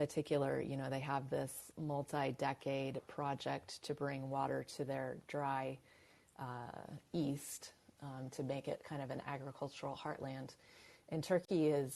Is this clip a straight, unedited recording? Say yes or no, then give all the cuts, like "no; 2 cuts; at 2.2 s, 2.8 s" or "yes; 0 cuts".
yes; 0 cuts